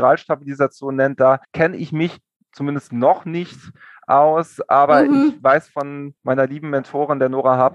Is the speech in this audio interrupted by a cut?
yes; 1 cut; at 1.4 s

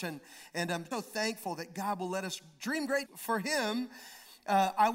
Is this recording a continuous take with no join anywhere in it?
no; 2 cuts; at 0.9 s, 3.0 s

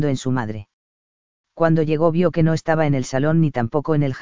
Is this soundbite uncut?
yes; 0 cuts

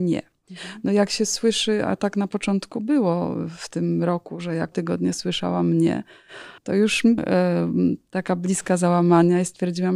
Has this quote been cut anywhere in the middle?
yes; 3 cuts; at 4.7 s, 6.6 s, 7.2 s

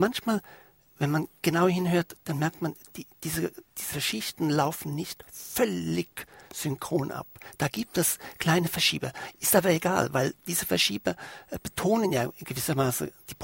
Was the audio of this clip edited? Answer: no; 0 cuts

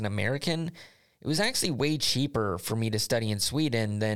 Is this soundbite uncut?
yes; 0 cuts

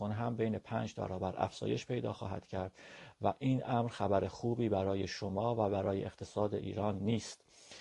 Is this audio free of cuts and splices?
no; 1 cut; at 1.0 s

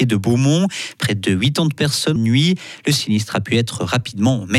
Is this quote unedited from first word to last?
no; 1 cut; at 2.2 s

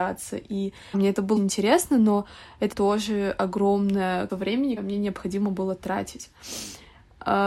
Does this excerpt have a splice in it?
yes; 5 cuts; at 0.9 s, 1.4 s, 2.7 s, 4.3 s, 4.8 s

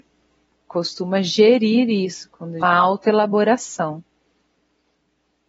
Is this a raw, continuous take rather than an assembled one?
no; 1 cut; at 2.6 s

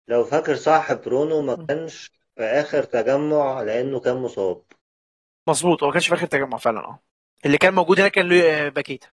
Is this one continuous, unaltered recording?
yes; 0 cuts

